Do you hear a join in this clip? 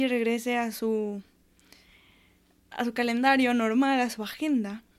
no; 0 cuts

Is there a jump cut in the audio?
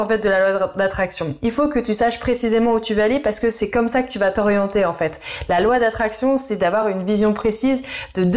no; 0 cuts

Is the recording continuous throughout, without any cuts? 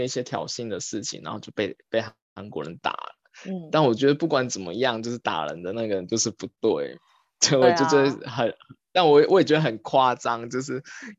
yes; 0 cuts

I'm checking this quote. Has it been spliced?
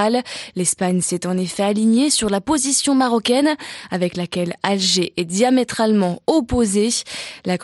no; 0 cuts

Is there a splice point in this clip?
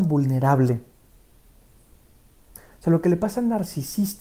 no; 0 cuts

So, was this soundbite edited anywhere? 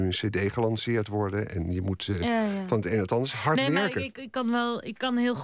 no; 0 cuts

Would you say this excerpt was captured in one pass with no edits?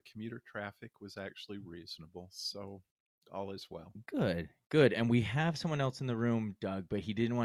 yes; 0 cuts

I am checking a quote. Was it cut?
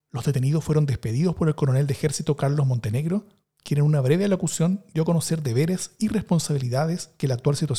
no; 0 cuts

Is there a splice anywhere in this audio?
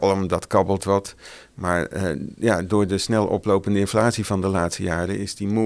no; 0 cuts

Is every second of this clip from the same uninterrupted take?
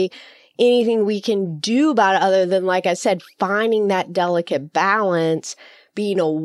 yes; 0 cuts

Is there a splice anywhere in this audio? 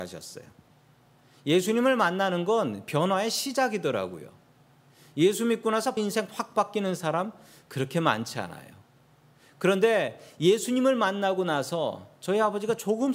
yes; 1 cut; at 6.0 s

